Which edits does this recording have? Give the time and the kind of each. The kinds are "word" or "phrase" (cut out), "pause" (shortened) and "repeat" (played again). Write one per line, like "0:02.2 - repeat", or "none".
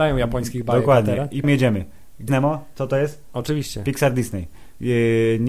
0:01.4 - word
0:02.3 - word